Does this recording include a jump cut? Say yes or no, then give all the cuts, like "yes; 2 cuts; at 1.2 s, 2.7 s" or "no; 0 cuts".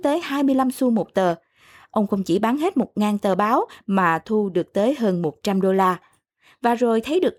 no; 0 cuts